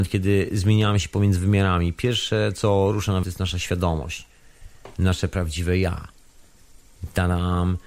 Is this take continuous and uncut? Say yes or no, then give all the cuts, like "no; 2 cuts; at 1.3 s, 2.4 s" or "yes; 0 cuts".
no; 1 cut; at 3.2 s